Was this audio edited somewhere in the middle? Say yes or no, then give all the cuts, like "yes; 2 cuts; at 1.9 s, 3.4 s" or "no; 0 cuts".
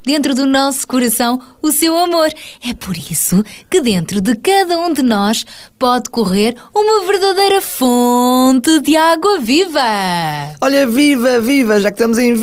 no; 0 cuts